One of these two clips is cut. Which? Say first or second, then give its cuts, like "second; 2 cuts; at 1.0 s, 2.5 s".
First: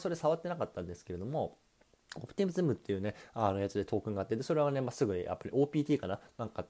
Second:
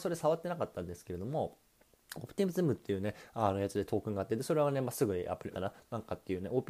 second; 1 cut; at 5.5 s